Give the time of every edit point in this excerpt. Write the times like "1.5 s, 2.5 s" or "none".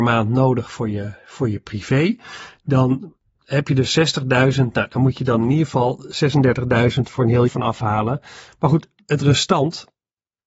7.5 s